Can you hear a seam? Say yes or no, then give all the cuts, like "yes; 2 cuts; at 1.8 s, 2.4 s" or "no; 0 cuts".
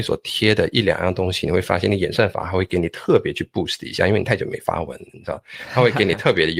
no; 0 cuts